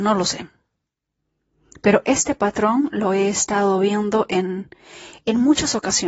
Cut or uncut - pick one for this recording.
uncut